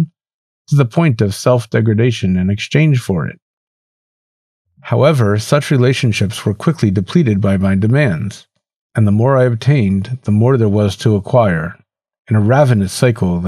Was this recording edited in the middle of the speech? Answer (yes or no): no